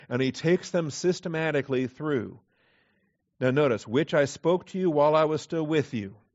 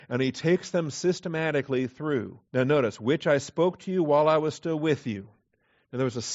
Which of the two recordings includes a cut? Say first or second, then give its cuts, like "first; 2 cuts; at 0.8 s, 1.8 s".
second; 1 cut; at 2.5 s